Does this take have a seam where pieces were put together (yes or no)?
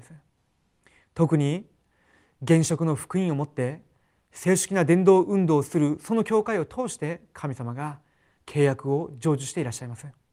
no